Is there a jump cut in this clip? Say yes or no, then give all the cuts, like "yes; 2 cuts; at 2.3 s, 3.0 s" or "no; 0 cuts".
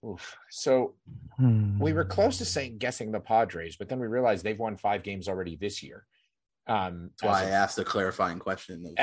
no; 0 cuts